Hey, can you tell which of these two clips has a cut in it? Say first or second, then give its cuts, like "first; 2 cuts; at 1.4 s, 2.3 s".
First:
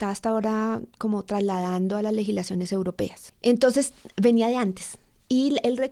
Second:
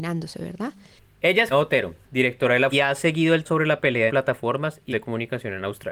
second; 6 cuts; at 1.5 s, 2.0 s, 2.7 s, 3.4 s, 4.1 s, 4.9 s